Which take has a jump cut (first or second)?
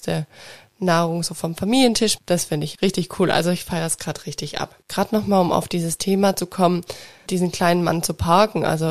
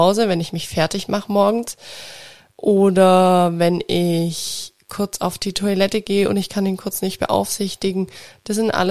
first